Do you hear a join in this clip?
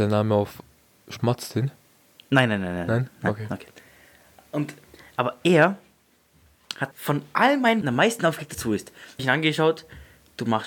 yes; 4 cuts; at 6.9 s, 7.8 s, 8.5 s, 9.2 s

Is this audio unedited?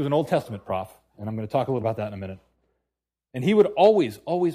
no; 1 cut; at 1.8 s

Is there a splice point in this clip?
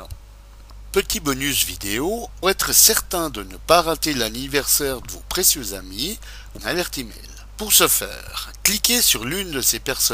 yes; 3 cuts; at 2.4 s, 5.0 s, 6.6 s

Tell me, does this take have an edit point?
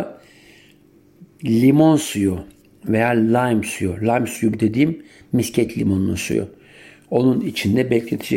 no; 0 cuts

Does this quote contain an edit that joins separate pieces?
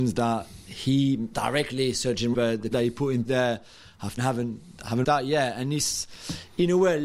yes; 6 cuts; at 1.3 s, 2.3 s, 2.7 s, 3.3 s, 4.2 s, 5.0 s

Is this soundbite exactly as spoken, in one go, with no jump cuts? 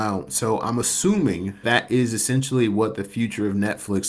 no; 1 cut; at 1.6 s

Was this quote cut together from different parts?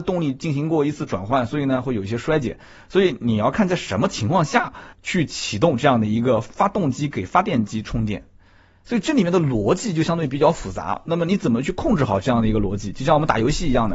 yes; 1 cut; at 4.9 s

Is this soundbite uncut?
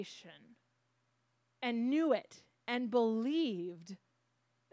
yes; 0 cuts

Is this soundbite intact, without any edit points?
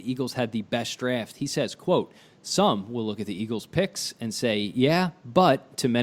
yes; 0 cuts

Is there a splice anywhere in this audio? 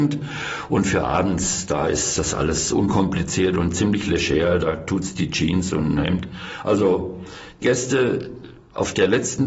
yes; 1 cut; at 7.6 s

